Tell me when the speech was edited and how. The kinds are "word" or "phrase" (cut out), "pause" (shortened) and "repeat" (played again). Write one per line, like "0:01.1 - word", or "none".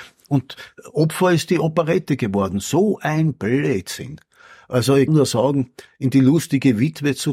0:05.1 - word